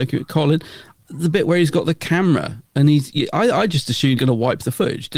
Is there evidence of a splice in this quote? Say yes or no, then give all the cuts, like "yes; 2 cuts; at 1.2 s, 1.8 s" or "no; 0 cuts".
yes; 1 cut; at 4.2 s